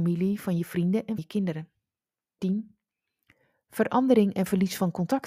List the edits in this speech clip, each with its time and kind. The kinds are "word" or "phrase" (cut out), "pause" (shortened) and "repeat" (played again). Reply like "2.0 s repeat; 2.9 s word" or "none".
1.2 s word; 2.4 s word